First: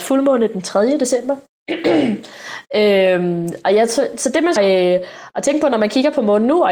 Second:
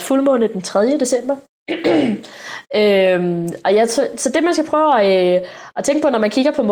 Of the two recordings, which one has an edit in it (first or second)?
first